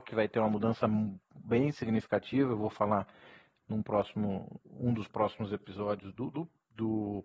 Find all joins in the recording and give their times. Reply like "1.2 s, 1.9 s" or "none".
none